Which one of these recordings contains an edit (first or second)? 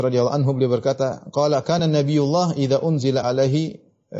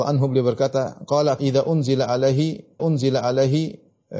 second